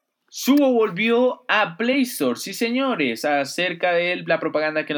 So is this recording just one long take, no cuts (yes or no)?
yes